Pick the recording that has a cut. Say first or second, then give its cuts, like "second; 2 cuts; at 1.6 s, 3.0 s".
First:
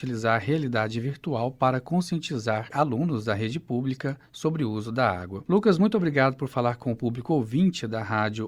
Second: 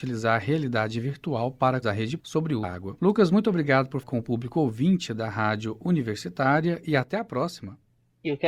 second; 4 cuts; at 1.8 s, 2.2 s, 2.6 s, 4.0 s